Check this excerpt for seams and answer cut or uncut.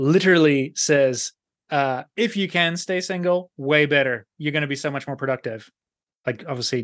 uncut